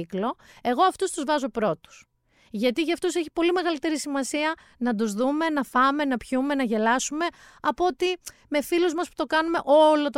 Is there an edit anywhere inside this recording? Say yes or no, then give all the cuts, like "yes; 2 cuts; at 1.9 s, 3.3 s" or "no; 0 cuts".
no; 0 cuts